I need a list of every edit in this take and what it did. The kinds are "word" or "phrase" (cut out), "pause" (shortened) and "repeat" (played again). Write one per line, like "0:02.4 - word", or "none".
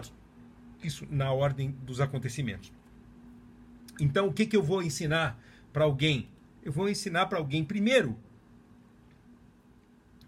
none